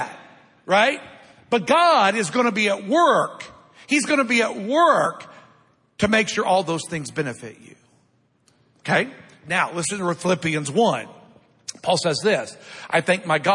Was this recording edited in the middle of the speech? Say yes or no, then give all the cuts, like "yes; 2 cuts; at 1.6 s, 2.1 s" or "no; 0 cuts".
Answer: no; 0 cuts